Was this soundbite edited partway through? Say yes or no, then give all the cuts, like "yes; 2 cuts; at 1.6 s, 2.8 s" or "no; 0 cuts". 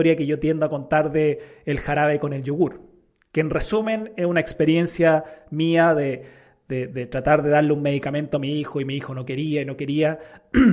no; 0 cuts